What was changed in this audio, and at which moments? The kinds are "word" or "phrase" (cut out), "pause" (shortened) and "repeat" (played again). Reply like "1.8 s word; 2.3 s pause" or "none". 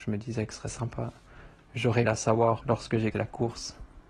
2.0 s word; 2.6 s word; 3.1 s word